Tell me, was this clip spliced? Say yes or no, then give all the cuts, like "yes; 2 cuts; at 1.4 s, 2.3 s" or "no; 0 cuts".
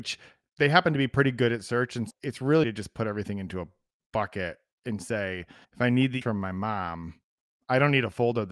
yes; 4 cuts; at 2.1 s, 2.6 s, 5.6 s, 6.2 s